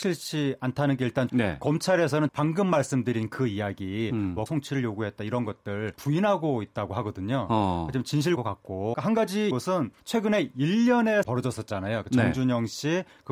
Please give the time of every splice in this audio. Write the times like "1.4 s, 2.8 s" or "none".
1.3 s, 2.3 s, 4.5 s, 6.0 s, 8.4 s, 8.9 s, 9.5 s, 10.0 s, 11.2 s